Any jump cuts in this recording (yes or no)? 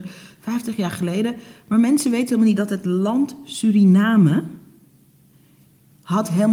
no